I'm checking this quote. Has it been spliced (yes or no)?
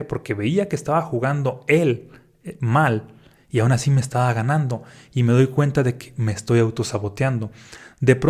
no